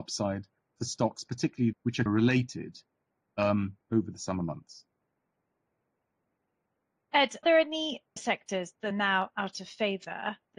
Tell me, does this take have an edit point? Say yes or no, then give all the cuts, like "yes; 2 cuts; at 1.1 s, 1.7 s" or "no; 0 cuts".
yes; 6 cuts; at 1.7 s, 2.1 s, 3.8 s, 7.4 s, 8.2 s, 8.9 s